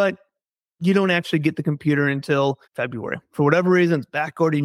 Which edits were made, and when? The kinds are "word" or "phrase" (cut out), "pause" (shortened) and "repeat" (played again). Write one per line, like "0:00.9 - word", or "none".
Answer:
0:02.6 - pause